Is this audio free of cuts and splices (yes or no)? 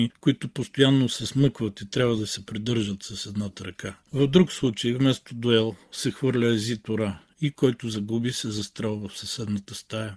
yes